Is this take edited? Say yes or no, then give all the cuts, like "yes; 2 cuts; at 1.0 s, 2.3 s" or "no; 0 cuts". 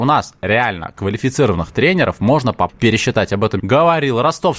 yes; 2 cuts; at 2.7 s, 3.6 s